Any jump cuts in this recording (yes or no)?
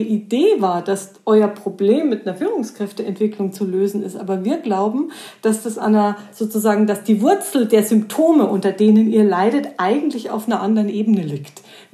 no